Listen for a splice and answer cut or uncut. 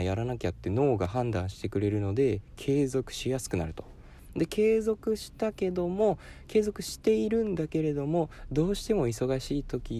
uncut